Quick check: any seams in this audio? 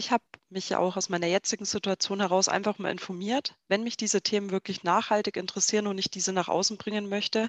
no; 0 cuts

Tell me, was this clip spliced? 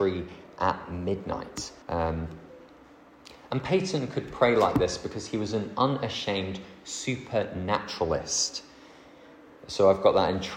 yes; 1 cut; at 1.8 s

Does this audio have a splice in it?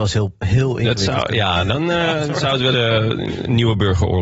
yes; 1 cut; at 2.7 s

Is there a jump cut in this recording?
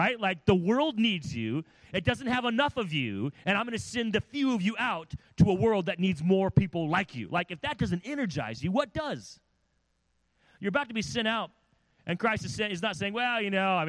no; 0 cuts

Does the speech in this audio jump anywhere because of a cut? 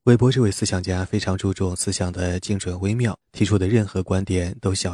yes; 1 cut; at 3.2 s

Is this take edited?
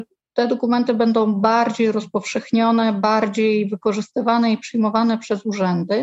no; 0 cuts

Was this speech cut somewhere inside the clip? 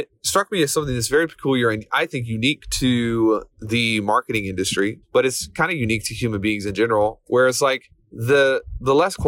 yes; 3 cuts; at 3.5 s, 5.0 s, 7.9 s

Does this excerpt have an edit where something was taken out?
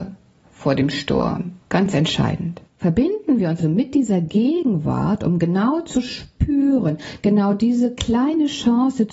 yes; 3 cuts; at 1.6 s, 2.7 s, 3.6 s

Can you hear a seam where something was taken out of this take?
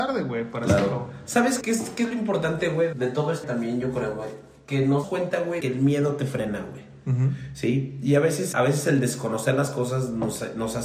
yes; 6 cuts; at 1.6 s, 2.9 s, 3.4 s, 5.0 s, 5.6 s, 8.5 s

